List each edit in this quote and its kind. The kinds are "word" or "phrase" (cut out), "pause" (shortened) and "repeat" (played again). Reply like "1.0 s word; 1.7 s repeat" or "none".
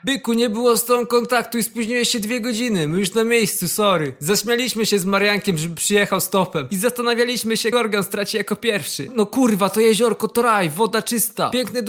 7.7 s word